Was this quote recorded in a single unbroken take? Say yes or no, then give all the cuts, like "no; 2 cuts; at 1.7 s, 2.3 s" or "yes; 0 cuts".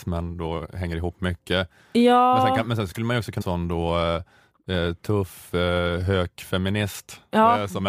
no; 1 cut; at 3.4 s